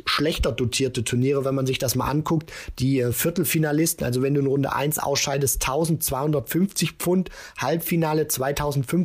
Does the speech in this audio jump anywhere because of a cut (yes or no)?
no